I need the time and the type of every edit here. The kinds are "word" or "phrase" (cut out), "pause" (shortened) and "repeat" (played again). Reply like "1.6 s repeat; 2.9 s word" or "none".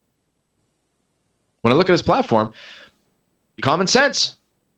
3.6 s word